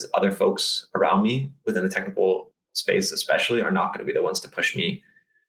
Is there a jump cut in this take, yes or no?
no